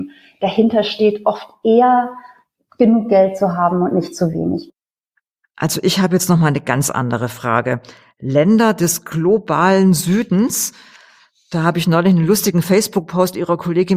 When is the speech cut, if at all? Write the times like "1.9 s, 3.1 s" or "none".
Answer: none